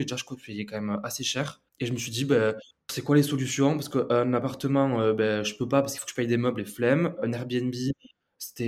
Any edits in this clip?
yes; 2 cuts; at 1.7 s, 2.7 s

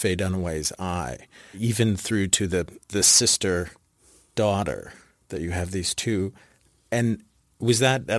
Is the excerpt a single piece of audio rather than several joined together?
yes; 0 cuts

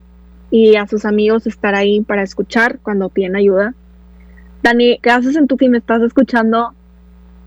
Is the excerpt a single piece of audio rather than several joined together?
no; 2 cuts; at 5.0 s, 5.6 s

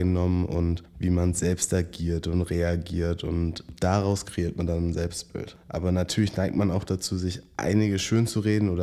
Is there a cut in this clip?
no; 0 cuts

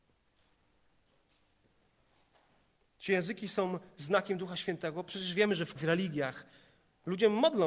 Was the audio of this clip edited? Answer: yes; 1 cut; at 5.8 s

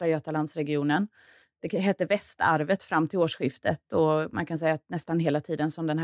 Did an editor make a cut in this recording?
no; 0 cuts

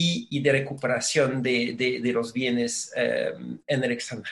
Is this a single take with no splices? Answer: yes; 0 cuts

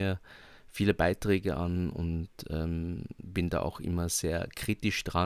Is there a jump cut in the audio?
no; 0 cuts

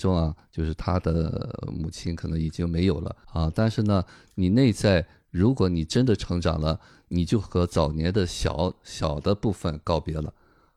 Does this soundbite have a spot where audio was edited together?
yes; 1 cut; at 3.2 s

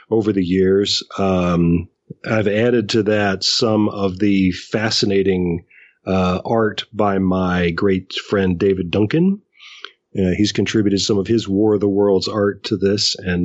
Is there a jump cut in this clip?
no; 0 cuts

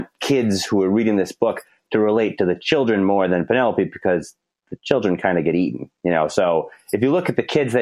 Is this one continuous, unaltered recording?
yes; 0 cuts

